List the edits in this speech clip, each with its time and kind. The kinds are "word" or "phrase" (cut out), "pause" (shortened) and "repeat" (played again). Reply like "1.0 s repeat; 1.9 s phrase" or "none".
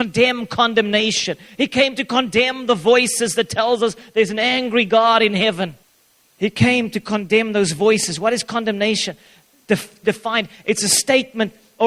10.0 s word